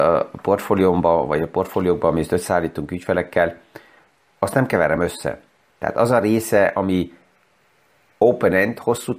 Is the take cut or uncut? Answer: uncut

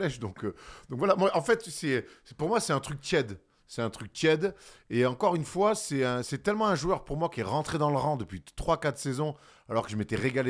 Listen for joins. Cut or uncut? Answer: uncut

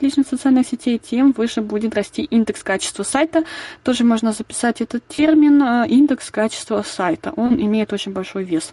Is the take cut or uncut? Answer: uncut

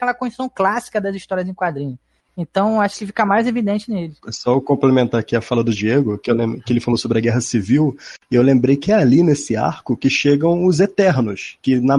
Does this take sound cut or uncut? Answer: uncut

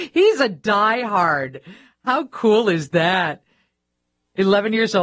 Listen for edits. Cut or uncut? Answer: uncut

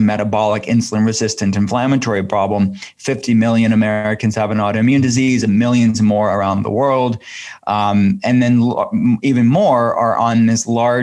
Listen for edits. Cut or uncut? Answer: uncut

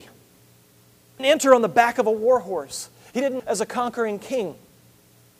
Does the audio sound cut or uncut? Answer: cut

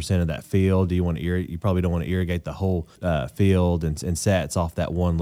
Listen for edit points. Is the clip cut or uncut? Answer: cut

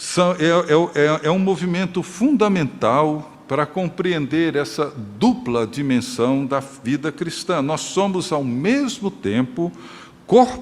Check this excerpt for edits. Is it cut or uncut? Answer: uncut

